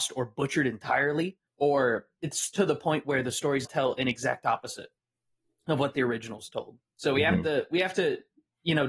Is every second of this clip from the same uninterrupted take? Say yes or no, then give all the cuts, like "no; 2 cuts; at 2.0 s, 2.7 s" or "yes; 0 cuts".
no; 2 cuts; at 1.5 s, 3.6 s